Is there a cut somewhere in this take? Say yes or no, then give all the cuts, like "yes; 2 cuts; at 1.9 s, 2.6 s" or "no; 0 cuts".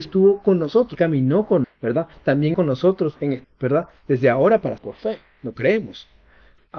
yes; 5 cuts; at 0.9 s, 1.6 s, 2.5 s, 3.4 s, 4.8 s